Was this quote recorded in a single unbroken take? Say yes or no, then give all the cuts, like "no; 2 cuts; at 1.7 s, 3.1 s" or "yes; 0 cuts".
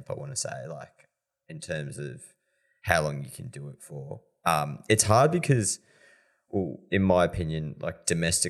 yes; 0 cuts